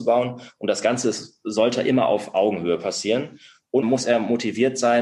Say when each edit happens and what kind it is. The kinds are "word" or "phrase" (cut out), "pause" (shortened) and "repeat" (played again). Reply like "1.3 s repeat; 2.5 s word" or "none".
3.8 s word